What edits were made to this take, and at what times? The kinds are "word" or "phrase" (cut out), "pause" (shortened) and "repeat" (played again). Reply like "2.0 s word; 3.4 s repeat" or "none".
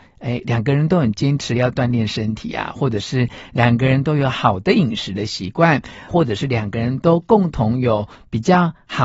6.1 s word